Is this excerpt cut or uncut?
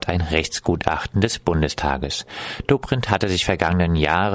uncut